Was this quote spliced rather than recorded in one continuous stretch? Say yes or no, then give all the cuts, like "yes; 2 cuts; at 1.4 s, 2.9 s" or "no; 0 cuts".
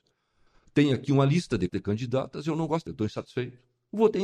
yes; 2 cuts; at 1.7 s, 2.9 s